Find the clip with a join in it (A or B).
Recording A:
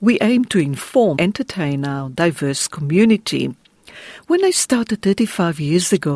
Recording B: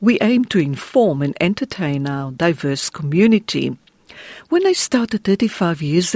A